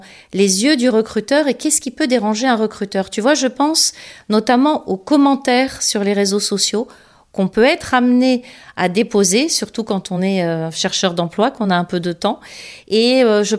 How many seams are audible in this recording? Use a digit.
0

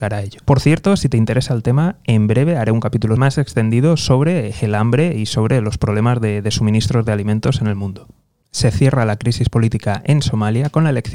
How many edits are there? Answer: 1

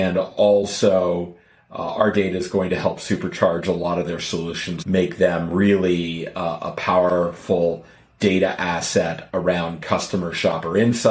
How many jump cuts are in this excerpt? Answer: 0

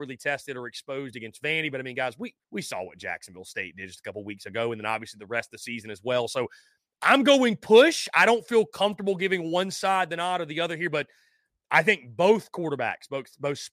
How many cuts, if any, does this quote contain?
1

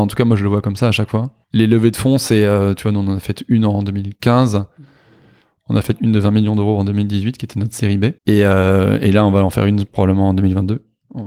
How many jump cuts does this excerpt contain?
2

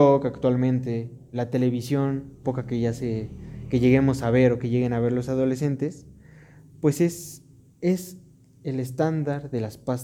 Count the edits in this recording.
3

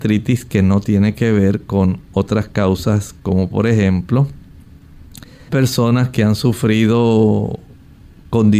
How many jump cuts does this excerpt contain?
1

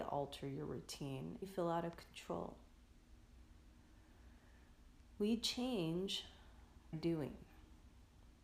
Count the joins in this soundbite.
2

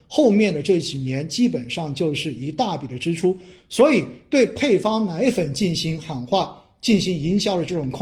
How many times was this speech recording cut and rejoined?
0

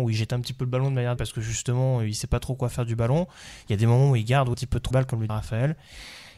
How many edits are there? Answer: 4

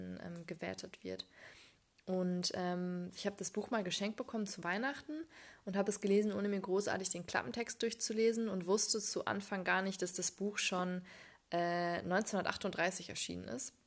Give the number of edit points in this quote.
0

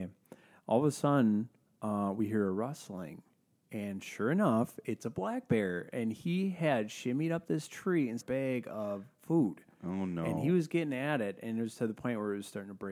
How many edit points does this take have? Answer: 1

